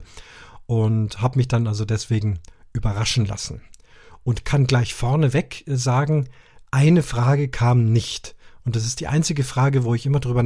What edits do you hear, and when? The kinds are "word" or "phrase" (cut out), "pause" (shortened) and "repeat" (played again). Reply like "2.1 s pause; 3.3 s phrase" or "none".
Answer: none